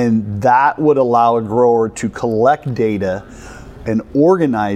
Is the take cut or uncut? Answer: uncut